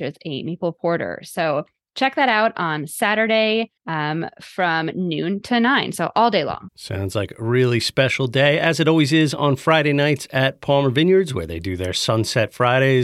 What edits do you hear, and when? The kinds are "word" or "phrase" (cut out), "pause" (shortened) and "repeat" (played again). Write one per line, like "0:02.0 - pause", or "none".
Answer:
0:03.8 - pause
0:06.7 - pause